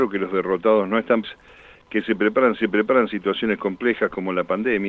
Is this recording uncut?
no; 2 cuts; at 1.2 s, 2.6 s

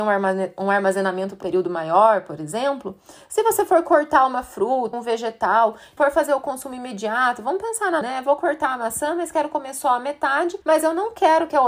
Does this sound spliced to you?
yes; 5 cuts; at 1.4 s, 4.9 s, 6.0 s, 8.0 s, 10.6 s

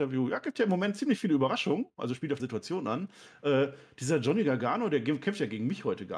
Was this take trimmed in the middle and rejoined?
yes; 1 cut; at 2.4 s

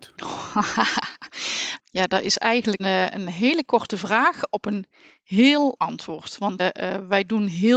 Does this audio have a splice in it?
yes; 4 cuts; at 1.8 s, 2.8 s, 5.8 s, 6.6 s

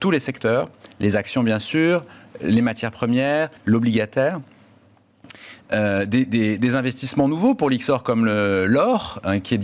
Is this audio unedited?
no; 1 cut; at 3.6 s

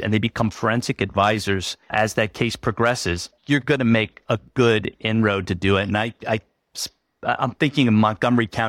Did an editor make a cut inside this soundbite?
yes; 2 cuts; at 1.8 s, 3.4 s

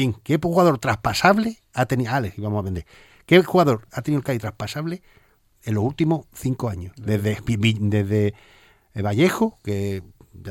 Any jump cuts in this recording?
no; 0 cuts

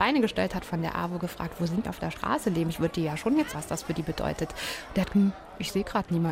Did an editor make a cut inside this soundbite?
yes; 3 cuts; at 1.8 s, 3.5 s, 5.1 s

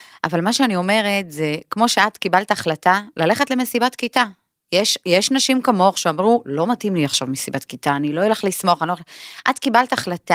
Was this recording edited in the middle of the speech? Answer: no; 0 cuts

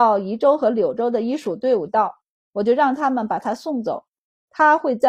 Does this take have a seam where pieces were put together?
no; 0 cuts

